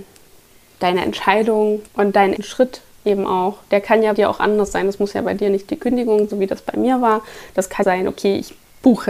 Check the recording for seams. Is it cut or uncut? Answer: cut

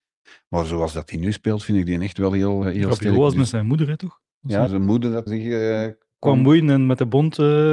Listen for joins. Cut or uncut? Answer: cut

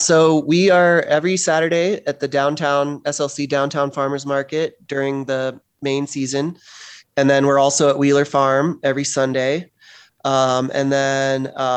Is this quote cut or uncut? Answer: uncut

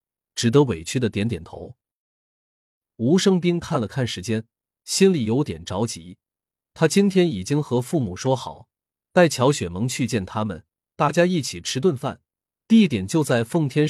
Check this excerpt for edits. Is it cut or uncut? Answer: uncut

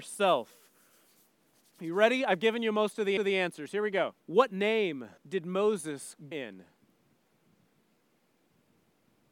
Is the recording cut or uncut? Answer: cut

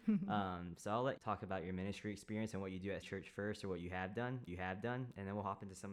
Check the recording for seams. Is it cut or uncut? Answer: cut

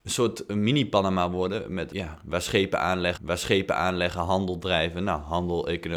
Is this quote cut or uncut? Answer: cut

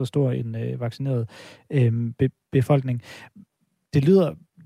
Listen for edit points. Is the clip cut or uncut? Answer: uncut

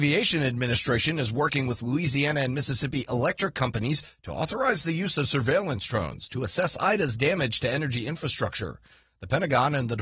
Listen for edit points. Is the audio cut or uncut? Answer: uncut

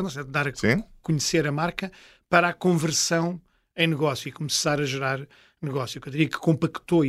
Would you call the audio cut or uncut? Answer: uncut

